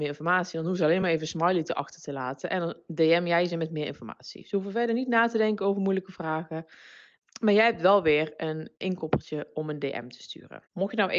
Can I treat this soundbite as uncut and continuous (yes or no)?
yes